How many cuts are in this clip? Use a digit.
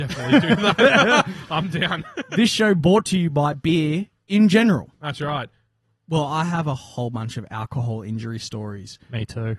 0